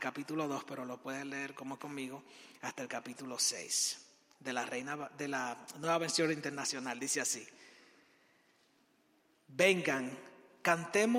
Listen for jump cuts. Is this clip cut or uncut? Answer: cut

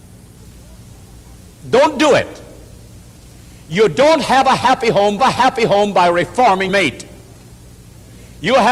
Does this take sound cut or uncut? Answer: cut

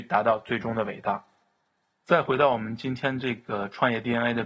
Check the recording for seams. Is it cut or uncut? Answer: uncut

